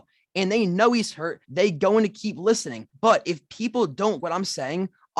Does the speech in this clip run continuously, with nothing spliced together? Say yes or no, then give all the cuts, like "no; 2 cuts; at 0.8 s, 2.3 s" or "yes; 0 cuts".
no; 3 cuts; at 1.4 s, 2.9 s, 4.2 s